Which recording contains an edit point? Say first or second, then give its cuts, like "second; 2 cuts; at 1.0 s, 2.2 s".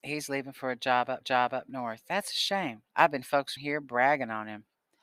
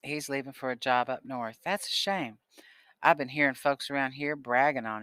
first; 4 cuts; at 1.2 s, 2.9 s, 3.2 s, 3.6 s